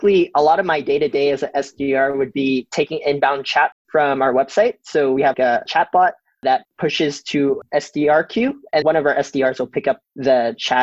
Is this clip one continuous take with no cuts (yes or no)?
no